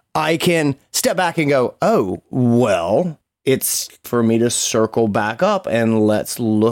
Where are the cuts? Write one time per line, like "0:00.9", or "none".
0:04.0